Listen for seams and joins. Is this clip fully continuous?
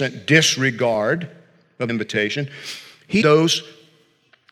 no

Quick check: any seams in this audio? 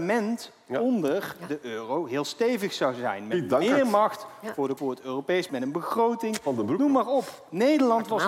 yes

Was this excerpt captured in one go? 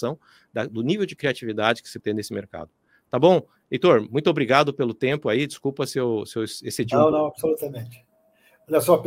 no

